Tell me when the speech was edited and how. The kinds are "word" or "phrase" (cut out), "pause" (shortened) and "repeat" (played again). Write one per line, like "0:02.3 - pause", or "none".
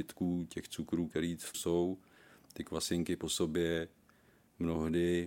0:01.5 - phrase

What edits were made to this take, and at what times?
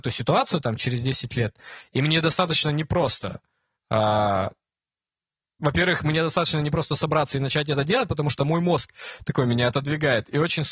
none

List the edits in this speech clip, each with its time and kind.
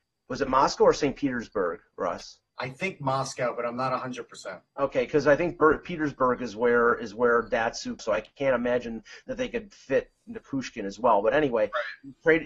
0:02.5 - pause
0:04.7 - pause
0:08.0 - phrase

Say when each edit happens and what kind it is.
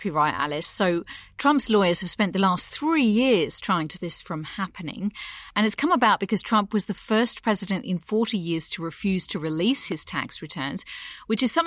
0:03.9 - word

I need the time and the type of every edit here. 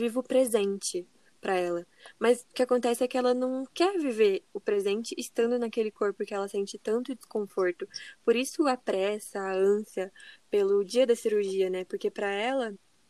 none

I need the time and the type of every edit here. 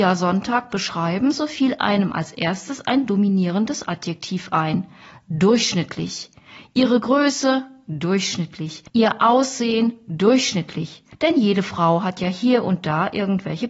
0:08.9 - pause
0:11.1 - pause

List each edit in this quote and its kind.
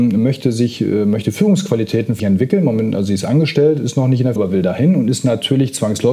0:02.2 - word
0:04.4 - word

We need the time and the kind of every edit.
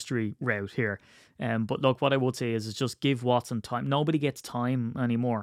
none

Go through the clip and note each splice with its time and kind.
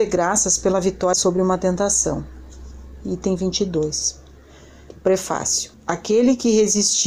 0:01.1 - word
0:05.7 - pause

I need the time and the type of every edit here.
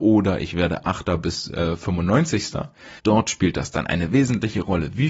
0:03.0 - pause

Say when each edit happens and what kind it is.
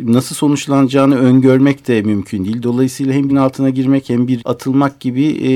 0:03.3 - word
0:04.4 - word

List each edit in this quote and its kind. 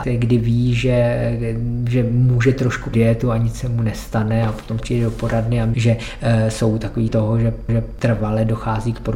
0:02.9 - word
0:04.8 - word
0:05.7 - word
0:07.1 - word
0:07.7 - repeat

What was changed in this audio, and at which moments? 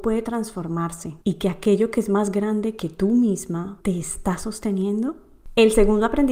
0:01.2 - pause
0:03.8 - pause

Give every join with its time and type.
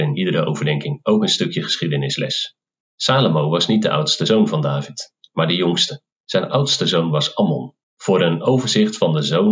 0:02.8 - pause
0:06.1 - pause
0:07.8 - pause

